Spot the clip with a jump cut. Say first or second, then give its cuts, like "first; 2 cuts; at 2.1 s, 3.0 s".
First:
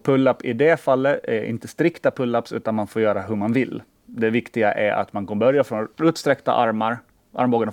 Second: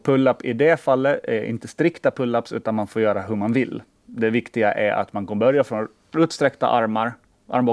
first; 1 cut; at 5.9 s